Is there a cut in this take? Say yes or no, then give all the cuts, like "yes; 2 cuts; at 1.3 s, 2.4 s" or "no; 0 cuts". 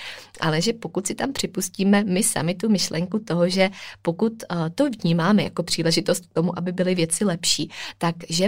no; 0 cuts